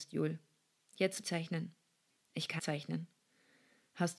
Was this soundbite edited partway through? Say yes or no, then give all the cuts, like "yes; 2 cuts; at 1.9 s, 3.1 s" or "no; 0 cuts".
yes; 2 cuts; at 1.2 s, 2.6 s